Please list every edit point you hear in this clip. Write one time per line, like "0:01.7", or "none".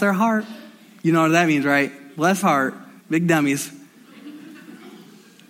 0:02.4
0:03.0

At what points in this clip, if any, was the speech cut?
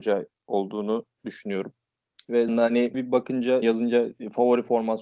0:02.5
0:02.9
0:03.6

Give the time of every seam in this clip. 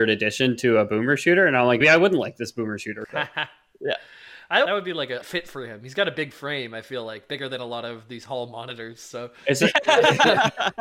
0:01.8
0:04.7
0:05.2

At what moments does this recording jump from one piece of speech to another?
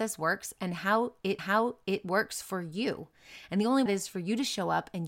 0:01.4
0:03.9

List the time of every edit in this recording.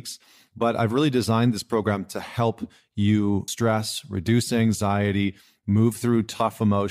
0:03.5

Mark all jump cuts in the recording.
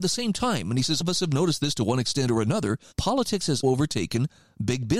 0:01.0
0:02.9
0:03.6

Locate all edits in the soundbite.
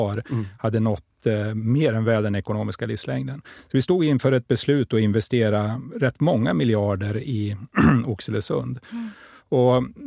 none

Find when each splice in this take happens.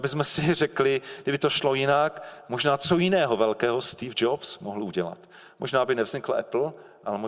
none

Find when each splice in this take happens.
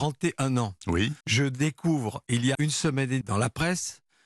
0:01.2
0:02.5
0:03.2

